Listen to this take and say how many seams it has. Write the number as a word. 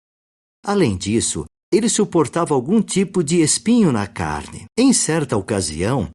one